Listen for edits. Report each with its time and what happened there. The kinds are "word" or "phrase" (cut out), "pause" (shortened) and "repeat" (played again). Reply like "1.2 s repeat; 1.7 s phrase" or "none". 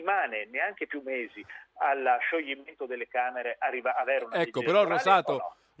none